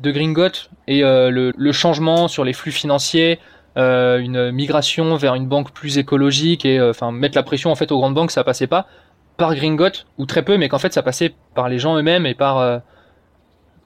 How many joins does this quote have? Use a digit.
3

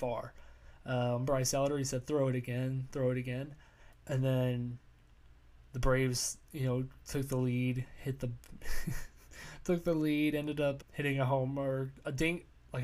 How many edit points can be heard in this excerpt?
1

